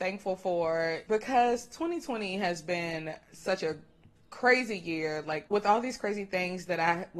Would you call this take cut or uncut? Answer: uncut